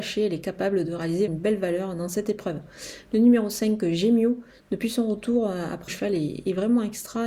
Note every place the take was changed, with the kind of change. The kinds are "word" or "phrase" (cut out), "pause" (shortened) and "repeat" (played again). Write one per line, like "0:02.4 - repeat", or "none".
0:01.3 - word
0:05.9 - phrase